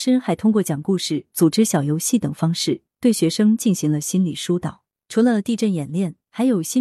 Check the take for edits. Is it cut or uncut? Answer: uncut